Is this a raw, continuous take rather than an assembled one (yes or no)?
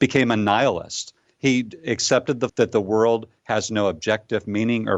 no